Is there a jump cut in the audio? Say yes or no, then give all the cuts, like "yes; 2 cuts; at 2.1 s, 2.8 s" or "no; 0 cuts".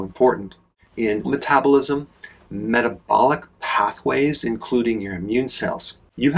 yes; 1 cut; at 1.2 s